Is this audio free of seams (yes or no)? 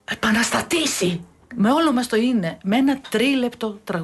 yes